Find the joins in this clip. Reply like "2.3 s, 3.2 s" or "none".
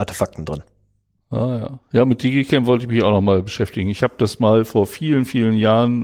none